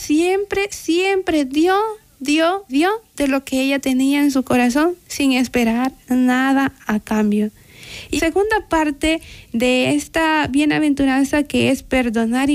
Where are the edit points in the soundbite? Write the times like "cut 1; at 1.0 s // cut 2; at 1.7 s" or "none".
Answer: cut 1; at 2.7 s // cut 2; at 8.2 s